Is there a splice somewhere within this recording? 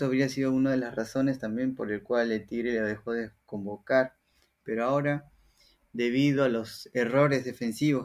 no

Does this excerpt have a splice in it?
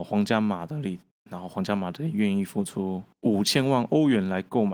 yes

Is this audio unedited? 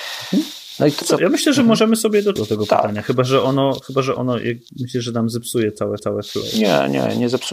no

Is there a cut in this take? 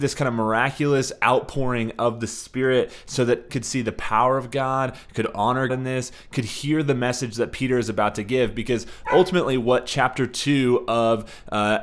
yes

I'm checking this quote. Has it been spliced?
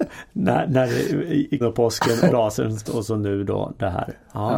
yes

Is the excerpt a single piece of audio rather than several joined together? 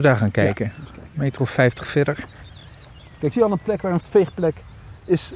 no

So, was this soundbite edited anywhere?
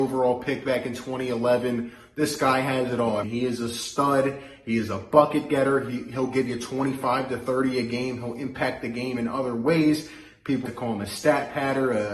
yes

